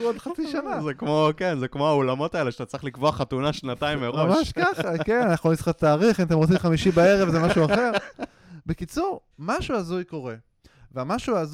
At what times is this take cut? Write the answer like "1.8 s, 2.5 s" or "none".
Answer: 9.3 s